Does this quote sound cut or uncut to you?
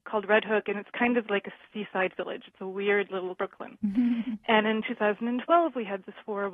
cut